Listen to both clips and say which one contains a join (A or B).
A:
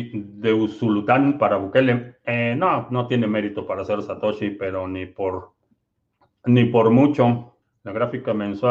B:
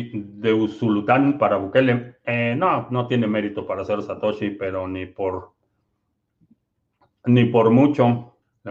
A